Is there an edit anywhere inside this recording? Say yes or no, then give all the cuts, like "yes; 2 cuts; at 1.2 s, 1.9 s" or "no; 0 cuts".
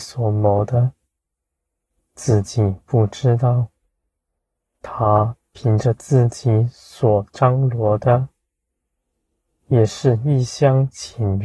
no; 0 cuts